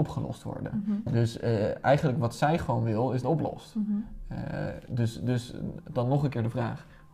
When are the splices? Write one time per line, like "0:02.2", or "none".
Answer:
0:03.2